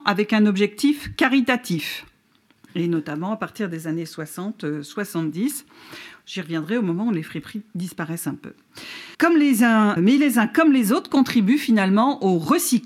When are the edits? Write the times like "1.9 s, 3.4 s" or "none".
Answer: 9.1 s, 10.0 s